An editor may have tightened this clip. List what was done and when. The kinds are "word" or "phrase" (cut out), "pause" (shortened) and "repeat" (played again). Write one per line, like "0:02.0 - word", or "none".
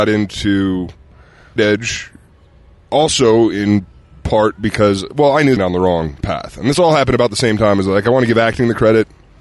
0:01.6 - word
0:05.6 - phrase